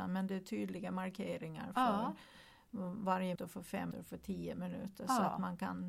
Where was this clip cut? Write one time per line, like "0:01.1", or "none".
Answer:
0:03.3
0:03.9